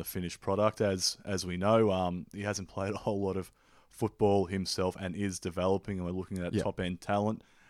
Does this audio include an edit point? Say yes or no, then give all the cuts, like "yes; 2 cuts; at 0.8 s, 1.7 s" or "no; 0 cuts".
no; 0 cuts